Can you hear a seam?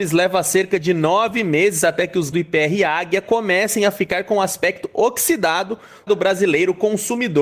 yes; 2 cuts; at 2.3 s, 6.1 s

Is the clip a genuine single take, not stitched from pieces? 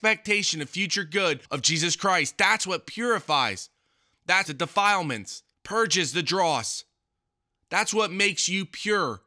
no; 3 cuts; at 1.5 s, 4.5 s, 5.5 s

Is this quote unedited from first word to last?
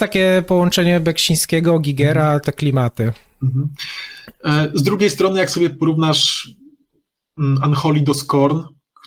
no; 1 cut; at 2.4 s

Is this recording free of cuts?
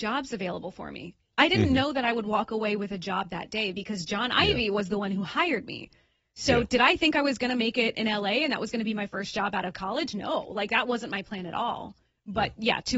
yes; 0 cuts

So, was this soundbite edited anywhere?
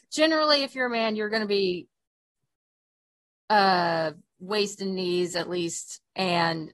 no; 0 cuts

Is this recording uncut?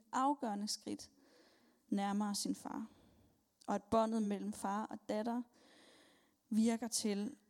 yes; 0 cuts

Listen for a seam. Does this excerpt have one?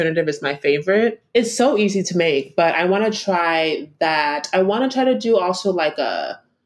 no; 0 cuts

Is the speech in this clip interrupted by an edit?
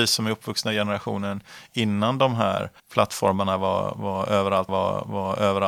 yes; 2 cuts; at 2.8 s, 4.7 s

